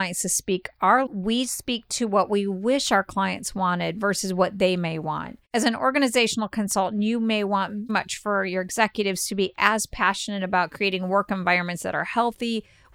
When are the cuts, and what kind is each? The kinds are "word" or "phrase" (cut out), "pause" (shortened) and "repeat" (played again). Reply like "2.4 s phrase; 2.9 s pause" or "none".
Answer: 1.1 s phrase; 5.5 s pause; 7.9 s word